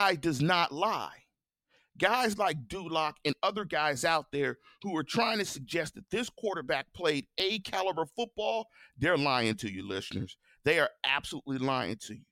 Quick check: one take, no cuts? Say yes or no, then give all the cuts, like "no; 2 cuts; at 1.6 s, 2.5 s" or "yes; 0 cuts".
yes; 0 cuts